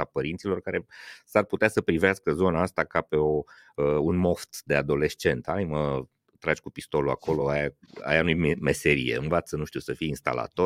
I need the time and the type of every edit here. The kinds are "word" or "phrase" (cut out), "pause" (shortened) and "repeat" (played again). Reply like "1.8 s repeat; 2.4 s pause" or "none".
none